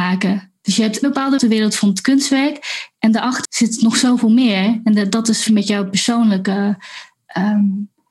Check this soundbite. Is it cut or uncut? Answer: cut